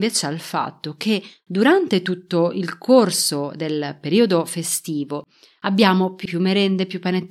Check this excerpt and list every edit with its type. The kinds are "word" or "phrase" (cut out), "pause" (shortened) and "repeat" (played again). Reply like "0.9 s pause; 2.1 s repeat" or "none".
6.3 s word

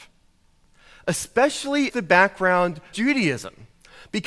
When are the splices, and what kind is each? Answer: 1.9 s word; 2.9 s word

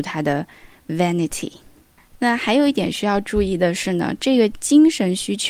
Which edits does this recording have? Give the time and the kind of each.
none

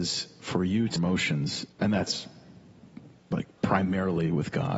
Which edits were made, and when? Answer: 1.0 s phrase; 1.7 s pause

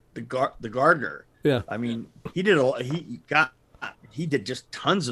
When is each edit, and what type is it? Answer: 1.3 s pause

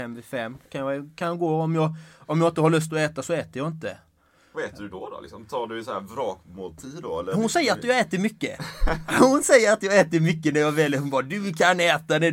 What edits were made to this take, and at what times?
none

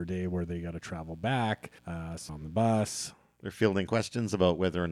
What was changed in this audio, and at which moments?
1.8 s pause; 2.3 s word; 3.9 s word

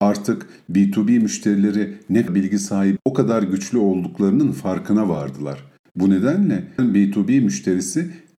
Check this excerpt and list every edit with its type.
2.3 s word; 3.0 s word; 6.8 s word

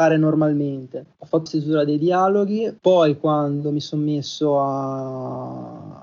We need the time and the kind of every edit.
1.1 s pause; 1.5 s word; 2.8 s pause

